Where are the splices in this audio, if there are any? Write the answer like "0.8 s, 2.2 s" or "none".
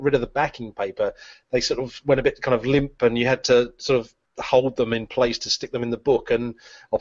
none